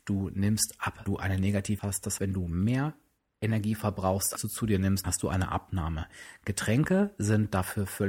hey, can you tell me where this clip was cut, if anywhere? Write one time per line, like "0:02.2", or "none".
0:01.1
0:01.8
0:02.2
0:04.4
0:05.0